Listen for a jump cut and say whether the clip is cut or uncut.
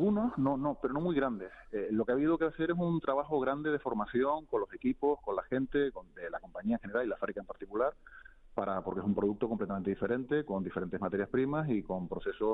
uncut